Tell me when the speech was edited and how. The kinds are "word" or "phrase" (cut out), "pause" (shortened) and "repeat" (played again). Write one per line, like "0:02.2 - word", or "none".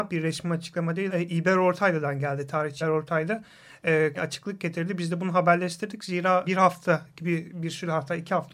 0:01.1 - word
0:02.8 - word
0:04.2 - word
0:06.4 - word